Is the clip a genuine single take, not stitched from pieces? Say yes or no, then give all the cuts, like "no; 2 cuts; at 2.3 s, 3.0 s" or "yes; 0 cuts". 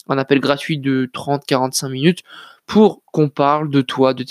no; 1 cut; at 3.1 s